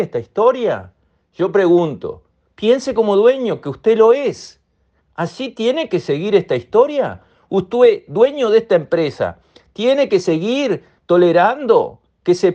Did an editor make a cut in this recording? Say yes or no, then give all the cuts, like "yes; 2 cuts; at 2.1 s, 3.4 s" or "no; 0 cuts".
no; 0 cuts